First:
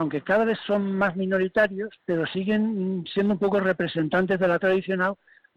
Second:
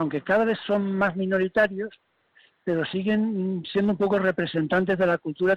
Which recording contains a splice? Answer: first; 2 cuts; at 2.0 s, 4.6 s

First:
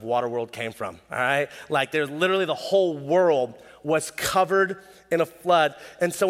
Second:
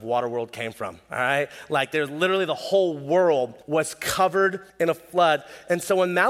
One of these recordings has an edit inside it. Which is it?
second; 2 cuts; at 3.6 s, 4.7 s

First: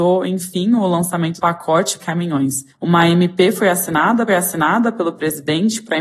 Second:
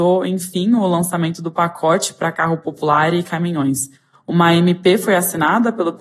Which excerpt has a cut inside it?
first; 4 cuts; at 1.4 s, 2.0 s, 2.7 s, 4.3 s

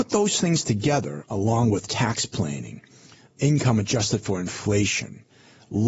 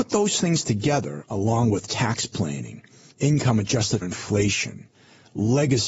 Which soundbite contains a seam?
second; 2 cuts; at 3.1 s, 4.0 s

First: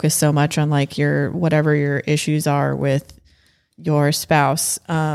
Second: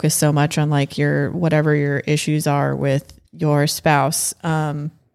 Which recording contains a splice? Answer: second; 1 cut; at 3.3 s

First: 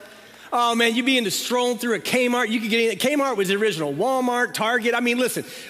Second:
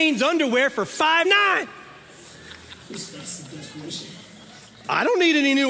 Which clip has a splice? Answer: second; 1 cut; at 1.2 s

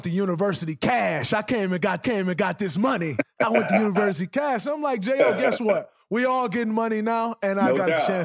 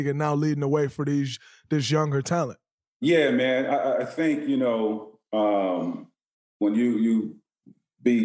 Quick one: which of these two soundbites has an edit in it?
first; 1 cut; at 2.0 s

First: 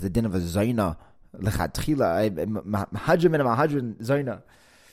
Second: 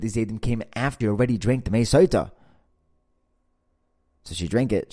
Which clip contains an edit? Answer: second; 1 cut; at 1.0 s

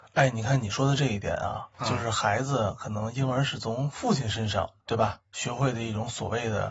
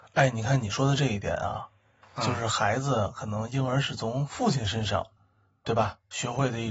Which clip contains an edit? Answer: first; 2 cuts; at 1.7 s, 4.8 s

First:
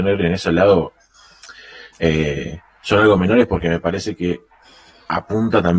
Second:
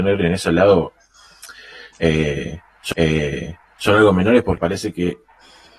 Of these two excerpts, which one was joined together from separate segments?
second; 2 cuts; at 2.9 s, 4.6 s

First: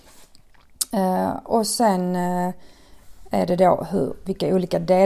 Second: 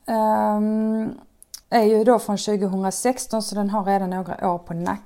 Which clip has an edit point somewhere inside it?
second; 1 cut; at 1.6 s

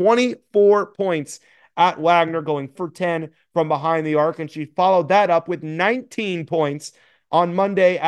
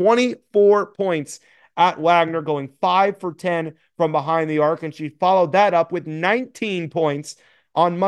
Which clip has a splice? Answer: first; 1 cut; at 2.8 s

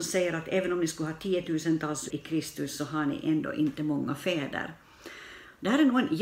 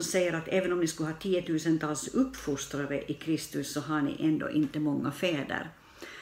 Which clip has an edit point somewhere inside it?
first; 1 cut; at 2.1 s

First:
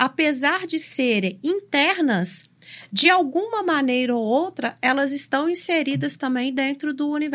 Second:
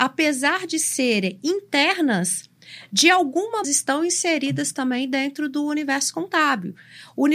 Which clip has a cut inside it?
second; 1 cut; at 3.6 s

